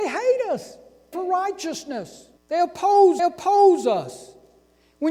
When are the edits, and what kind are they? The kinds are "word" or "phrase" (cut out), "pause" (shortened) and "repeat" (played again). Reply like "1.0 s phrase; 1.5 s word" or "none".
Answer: 1.1 s phrase; 2.4 s pause; 3.2 s repeat